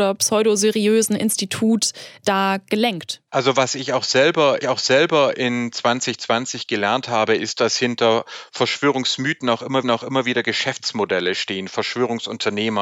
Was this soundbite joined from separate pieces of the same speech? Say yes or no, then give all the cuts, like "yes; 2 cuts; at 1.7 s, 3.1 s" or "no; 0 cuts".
yes; 3 cuts; at 3.3 s, 4.6 s, 9.8 s